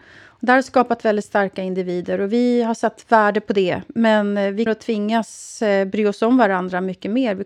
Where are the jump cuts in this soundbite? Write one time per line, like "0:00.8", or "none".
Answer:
0:04.7